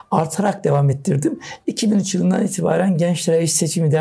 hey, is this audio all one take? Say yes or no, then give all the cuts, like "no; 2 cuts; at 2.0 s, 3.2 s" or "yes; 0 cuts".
yes; 0 cuts